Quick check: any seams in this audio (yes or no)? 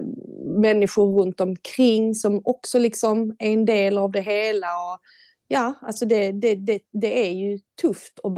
no